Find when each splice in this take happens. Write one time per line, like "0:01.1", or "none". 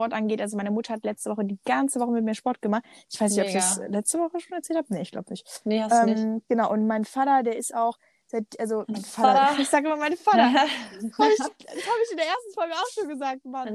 none

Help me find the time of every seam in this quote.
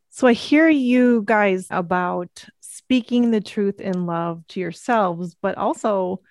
0:01.7
0:04.5

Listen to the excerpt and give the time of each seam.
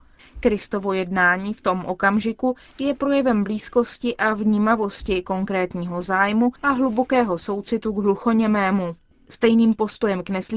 0:06.6

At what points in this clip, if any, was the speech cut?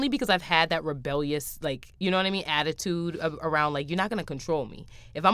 0:02.0

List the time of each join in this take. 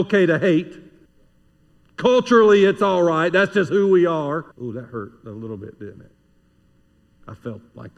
0:01.1
0:04.5

